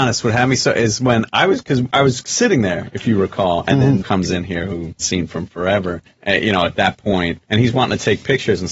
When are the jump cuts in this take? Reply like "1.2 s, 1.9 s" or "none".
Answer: 4.0 s, 5.0 s, 6.1 s, 7.4 s